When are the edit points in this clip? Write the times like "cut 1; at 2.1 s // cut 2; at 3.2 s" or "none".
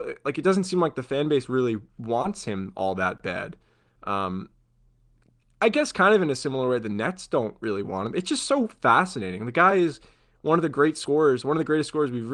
none